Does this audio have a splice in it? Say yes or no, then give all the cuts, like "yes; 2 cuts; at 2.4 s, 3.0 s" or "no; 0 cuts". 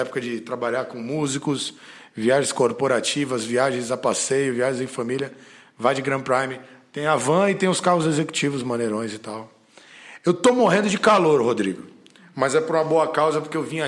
no; 0 cuts